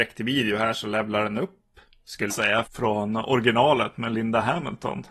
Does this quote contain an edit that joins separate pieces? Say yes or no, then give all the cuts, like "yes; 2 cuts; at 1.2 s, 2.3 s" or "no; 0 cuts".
yes; 2 cuts; at 2.3 s, 2.7 s